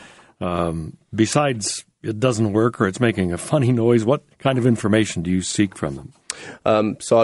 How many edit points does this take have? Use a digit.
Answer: 1